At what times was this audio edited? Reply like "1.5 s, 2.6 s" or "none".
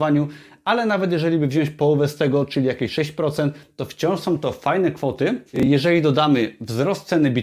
none